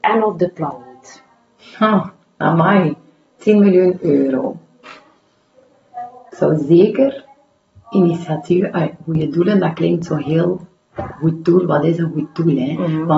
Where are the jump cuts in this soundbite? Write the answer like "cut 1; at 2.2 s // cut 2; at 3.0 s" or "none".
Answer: none